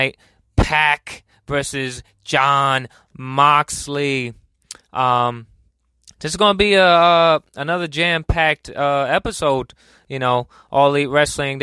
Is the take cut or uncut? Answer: uncut